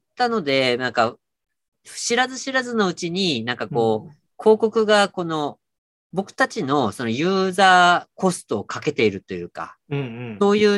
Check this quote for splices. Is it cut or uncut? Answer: uncut